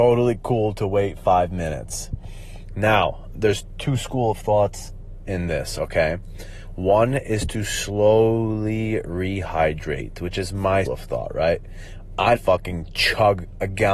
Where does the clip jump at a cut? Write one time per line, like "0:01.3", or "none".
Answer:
0:03.3
0:10.9
0:12.4